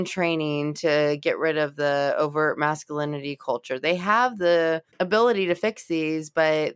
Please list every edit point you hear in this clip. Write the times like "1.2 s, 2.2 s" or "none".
4.9 s